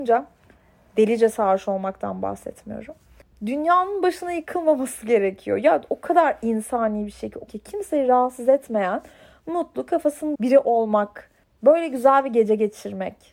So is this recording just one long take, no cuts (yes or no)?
no